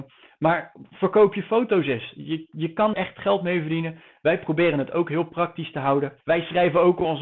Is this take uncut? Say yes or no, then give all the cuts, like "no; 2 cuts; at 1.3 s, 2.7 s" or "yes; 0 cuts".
no; 2 cuts; at 2.9 s, 6.2 s